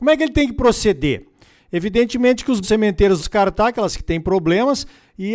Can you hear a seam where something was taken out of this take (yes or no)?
yes